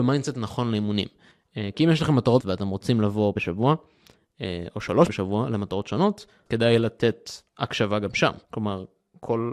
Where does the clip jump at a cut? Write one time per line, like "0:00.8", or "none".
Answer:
0:02.4
0:03.4
0:05.1
0:06.5
0:07.5
0:08.4